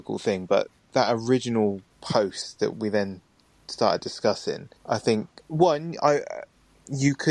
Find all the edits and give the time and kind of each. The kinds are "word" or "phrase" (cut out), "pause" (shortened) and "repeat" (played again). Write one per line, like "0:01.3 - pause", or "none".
0:01.9 - pause
0:02.7 - word
0:04.8 - pause
0:05.4 - pause